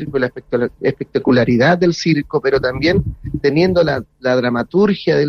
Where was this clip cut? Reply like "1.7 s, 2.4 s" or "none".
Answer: none